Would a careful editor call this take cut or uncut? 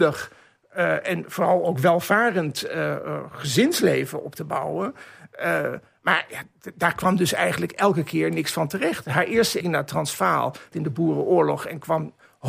cut